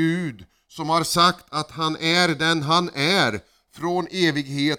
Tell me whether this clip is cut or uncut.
uncut